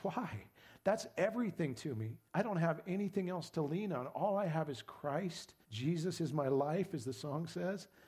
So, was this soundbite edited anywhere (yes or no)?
yes